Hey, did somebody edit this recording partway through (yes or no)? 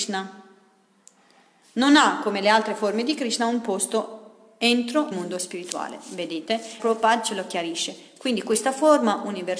yes